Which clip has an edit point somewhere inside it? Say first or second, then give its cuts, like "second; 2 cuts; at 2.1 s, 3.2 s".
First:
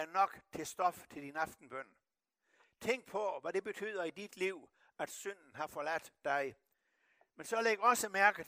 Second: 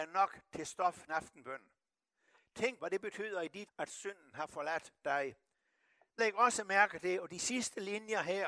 second; 4 cuts; at 1.1 s, 2.8 s, 3.7 s, 6.2 s